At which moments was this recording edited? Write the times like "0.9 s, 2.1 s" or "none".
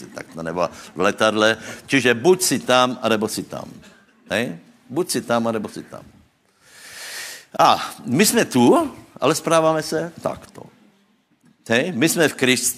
none

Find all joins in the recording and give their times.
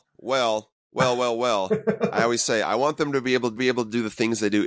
3.6 s

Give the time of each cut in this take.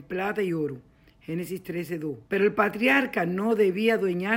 2.3 s

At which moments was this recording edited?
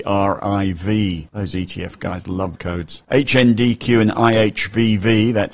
2.6 s

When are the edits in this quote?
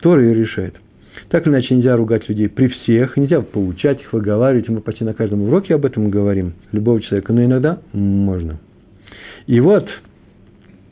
6.6 s

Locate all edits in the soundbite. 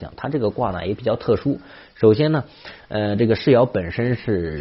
none

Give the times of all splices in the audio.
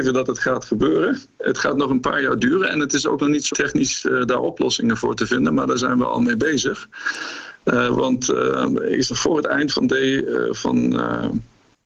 3.5 s, 9.1 s, 9.7 s

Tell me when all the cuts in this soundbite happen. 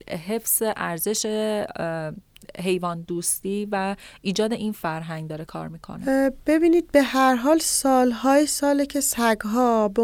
none

